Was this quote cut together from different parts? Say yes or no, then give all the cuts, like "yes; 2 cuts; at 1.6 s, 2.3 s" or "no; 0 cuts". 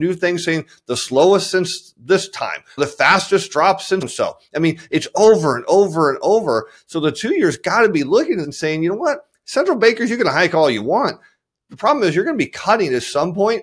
yes; 3 cuts; at 2.8 s, 4.0 s, 8.4 s